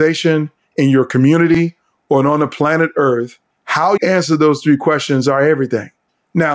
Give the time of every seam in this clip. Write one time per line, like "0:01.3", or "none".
0:04.0